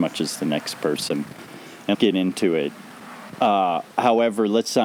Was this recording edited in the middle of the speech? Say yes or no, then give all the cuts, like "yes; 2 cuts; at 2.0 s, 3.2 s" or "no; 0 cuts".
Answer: yes; 1 cut; at 1.9 s